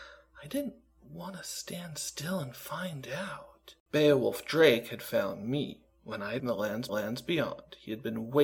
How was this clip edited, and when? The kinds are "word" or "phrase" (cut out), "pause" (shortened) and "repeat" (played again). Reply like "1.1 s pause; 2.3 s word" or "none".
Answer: 3.8 s pause; 6.4 s phrase; 6.9 s repeat